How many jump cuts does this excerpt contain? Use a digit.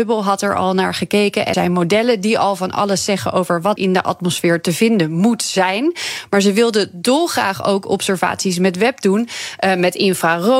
2